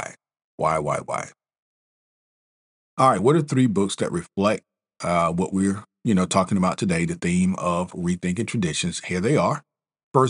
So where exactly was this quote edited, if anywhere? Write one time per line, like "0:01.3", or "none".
none